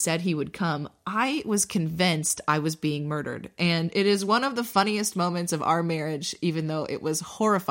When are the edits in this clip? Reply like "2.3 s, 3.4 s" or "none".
none